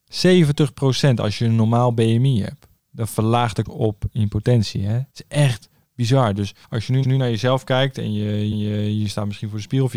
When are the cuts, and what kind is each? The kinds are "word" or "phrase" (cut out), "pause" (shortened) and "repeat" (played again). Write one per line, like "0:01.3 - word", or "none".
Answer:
0:02.8 - pause
0:03.7 - word
0:05.1 - pause
0:06.6 - pause
0:07.0 - repeat
0:08.5 - repeat